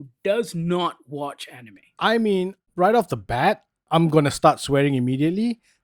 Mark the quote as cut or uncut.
uncut